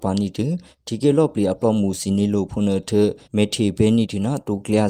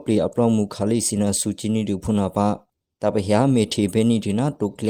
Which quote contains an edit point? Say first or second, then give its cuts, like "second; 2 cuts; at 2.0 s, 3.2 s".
first; 1 cut; at 3.3 s